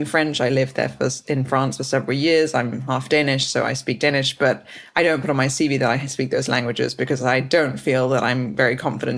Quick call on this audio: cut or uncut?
uncut